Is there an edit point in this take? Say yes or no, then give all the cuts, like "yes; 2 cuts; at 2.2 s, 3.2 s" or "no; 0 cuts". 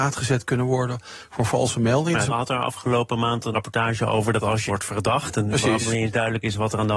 yes; 3 cuts; at 2.3 s, 3.5 s, 4.7 s